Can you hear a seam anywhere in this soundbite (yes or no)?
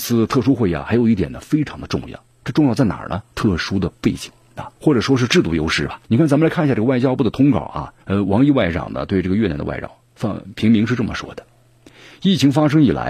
yes